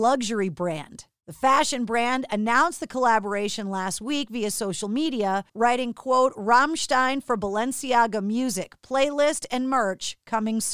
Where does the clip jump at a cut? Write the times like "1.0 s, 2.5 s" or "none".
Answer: 5.5 s